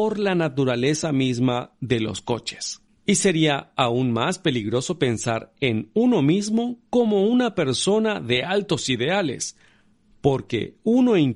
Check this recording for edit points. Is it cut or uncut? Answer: uncut